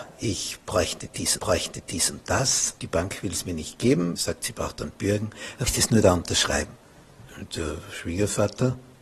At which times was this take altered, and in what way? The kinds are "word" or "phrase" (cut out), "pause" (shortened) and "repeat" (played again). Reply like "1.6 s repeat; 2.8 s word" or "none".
1.4 s repeat; 2.8 s word; 4.2 s word; 5.7 s word; 7.3 s pause